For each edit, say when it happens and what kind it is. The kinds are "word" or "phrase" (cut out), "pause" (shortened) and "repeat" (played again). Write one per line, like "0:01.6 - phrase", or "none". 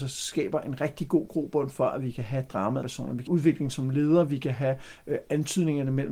0:02.8 - word
0:03.3 - phrase